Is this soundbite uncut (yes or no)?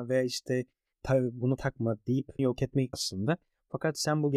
no